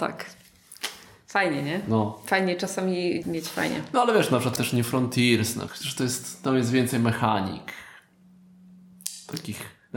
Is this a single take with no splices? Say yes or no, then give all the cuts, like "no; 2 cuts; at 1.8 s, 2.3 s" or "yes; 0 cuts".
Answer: no; 3 cuts; at 3.2 s, 4.6 s, 5.7 s